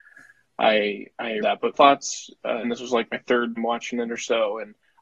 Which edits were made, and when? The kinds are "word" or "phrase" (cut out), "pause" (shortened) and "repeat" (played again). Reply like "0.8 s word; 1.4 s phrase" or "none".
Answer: 1.4 s word; 1.7 s word; 2.6 s word; 3.6 s word